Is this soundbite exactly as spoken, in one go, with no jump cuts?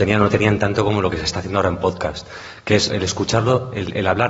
no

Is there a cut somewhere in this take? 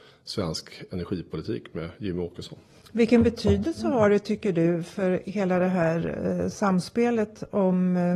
no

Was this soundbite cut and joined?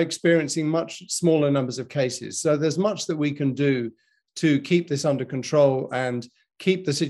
no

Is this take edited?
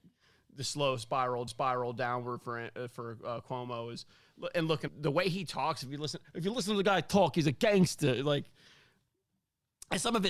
yes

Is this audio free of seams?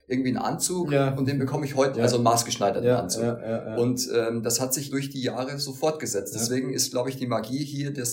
no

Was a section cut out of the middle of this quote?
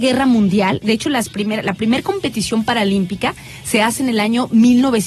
no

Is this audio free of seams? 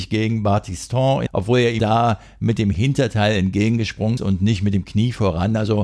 no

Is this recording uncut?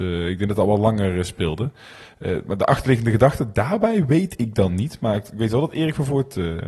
yes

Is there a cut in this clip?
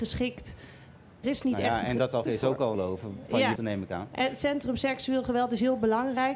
yes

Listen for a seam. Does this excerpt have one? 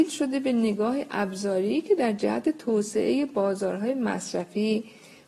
no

